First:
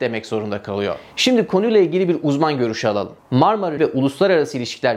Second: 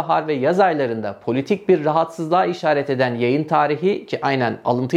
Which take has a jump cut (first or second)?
first